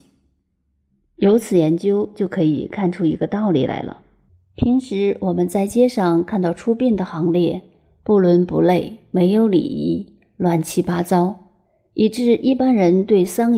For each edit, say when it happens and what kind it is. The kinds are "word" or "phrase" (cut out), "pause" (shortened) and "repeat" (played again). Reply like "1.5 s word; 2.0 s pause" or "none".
none